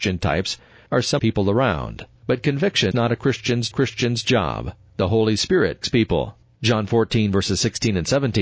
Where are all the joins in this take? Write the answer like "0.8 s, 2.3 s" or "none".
1.2 s, 2.2 s, 2.9 s, 3.7 s, 5.8 s